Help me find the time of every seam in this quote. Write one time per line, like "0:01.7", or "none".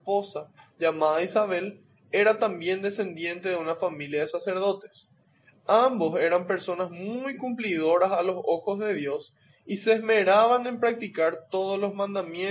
none